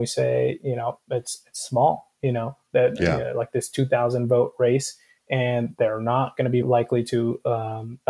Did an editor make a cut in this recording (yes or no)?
yes